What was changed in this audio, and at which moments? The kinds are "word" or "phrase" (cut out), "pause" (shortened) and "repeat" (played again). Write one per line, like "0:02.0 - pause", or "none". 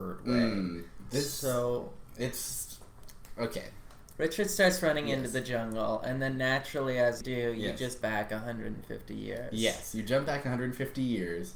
0:07.2 - word
0:08.0 - word